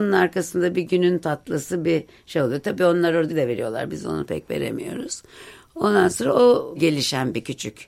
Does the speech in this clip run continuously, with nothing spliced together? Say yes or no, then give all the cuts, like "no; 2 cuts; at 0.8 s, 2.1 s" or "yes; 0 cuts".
no; 2 cuts; at 3.3 s, 6.8 s